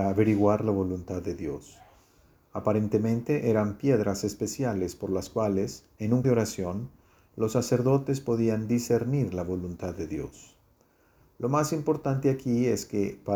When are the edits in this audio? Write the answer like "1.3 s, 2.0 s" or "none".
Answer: 6.2 s